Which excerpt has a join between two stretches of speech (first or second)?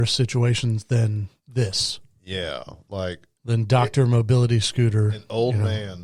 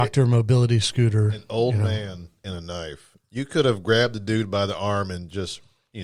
first